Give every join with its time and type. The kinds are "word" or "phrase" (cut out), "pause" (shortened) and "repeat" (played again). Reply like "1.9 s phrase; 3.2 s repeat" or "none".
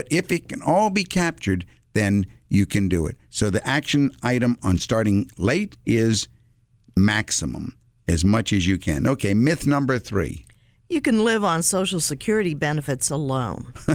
none